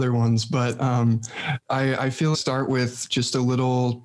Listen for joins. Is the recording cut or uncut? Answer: cut